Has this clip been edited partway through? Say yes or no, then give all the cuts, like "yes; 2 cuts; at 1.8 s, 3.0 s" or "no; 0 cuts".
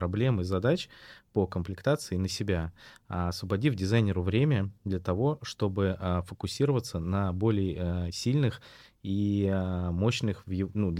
no; 0 cuts